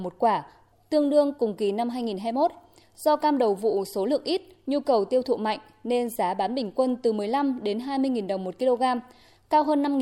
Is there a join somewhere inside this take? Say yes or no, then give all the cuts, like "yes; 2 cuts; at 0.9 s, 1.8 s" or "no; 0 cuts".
no; 0 cuts